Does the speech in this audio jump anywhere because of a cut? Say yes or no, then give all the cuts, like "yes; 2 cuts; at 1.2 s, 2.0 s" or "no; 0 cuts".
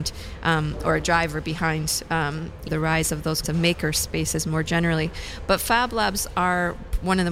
yes; 2 cuts; at 2.7 s, 3.4 s